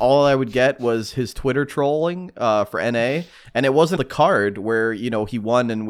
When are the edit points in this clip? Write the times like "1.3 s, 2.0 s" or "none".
4.0 s